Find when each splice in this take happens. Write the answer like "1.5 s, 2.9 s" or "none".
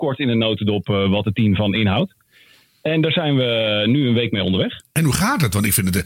none